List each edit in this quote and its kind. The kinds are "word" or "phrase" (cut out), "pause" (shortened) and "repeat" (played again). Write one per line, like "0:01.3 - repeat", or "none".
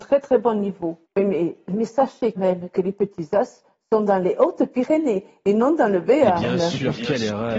0:01.0 - pause
0:02.4 - word

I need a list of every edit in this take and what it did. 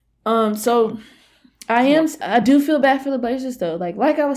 none

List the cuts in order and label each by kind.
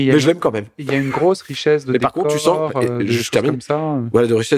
none

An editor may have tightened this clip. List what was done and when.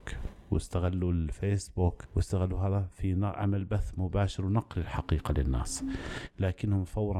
none

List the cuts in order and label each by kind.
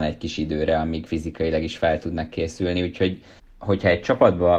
0:01.1 - word
0:03.4 - pause

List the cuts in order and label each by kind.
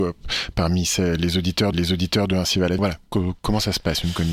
0:01.7 - repeat
0:02.8 - phrase

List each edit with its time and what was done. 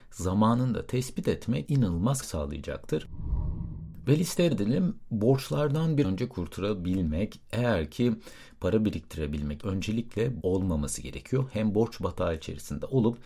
0:01.7 - word
0:02.2 - word
0:04.5 - word
0:06.0 - word
0:09.6 - word
0:10.4 - word

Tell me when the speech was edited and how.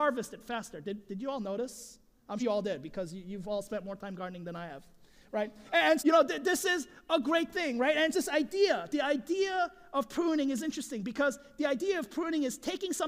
0:02.4 - word
0:06.0 - word
0:08.1 - word

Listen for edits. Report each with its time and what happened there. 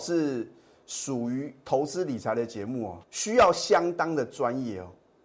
0:03.0 - pause

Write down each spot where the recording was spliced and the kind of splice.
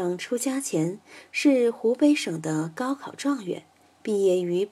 none

